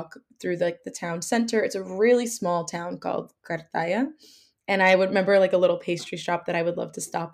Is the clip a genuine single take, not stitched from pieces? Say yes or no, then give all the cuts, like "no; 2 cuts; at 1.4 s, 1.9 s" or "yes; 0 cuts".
yes; 0 cuts